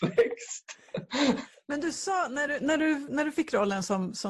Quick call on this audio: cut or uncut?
uncut